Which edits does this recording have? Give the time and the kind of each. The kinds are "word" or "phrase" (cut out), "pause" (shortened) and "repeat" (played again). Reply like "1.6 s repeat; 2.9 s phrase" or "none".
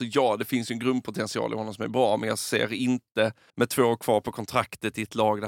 3.5 s pause